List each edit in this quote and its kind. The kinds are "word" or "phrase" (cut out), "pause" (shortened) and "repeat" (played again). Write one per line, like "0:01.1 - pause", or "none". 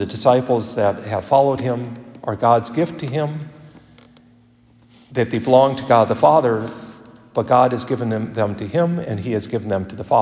none